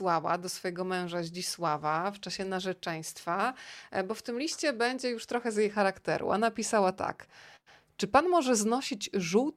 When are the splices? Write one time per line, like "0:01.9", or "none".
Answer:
none

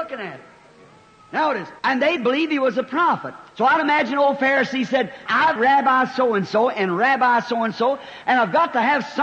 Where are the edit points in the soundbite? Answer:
0:01.8
0:02.2
0:03.5
0:05.3
0:05.6

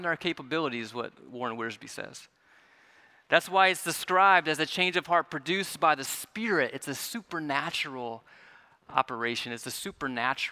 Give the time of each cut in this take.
none

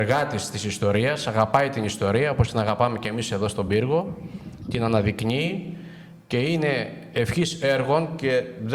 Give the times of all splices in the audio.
none

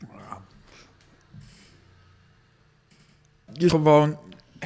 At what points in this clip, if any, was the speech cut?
0:03.7

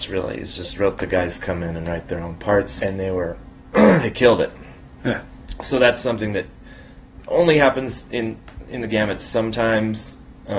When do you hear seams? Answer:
0:01.0
0:02.8

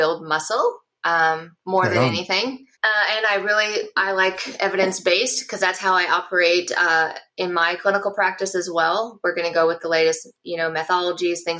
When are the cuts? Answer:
0:01.6
0:02.7

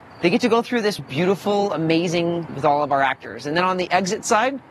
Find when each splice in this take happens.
0:01.0
0:02.5

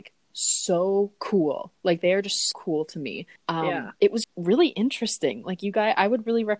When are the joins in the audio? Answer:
0:02.5
0:03.4
0:04.2

